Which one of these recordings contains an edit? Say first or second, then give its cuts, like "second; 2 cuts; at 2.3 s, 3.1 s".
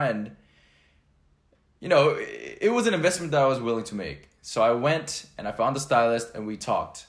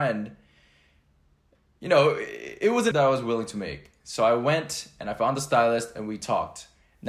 second; 1 cut; at 2.9 s